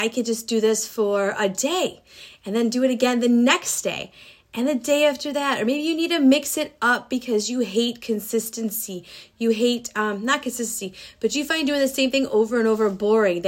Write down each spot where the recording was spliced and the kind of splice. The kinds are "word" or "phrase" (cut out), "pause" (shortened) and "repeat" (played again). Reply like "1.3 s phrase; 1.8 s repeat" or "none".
none